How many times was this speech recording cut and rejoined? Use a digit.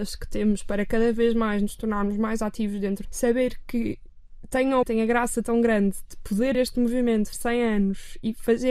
4